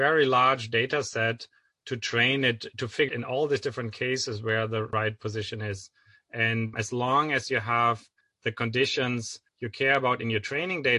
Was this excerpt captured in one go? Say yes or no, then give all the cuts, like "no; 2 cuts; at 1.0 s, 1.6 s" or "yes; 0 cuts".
no; 2 cuts; at 3.1 s, 6.7 s